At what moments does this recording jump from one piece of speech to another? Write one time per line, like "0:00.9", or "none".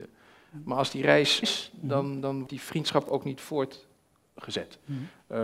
0:01.4
0:02.5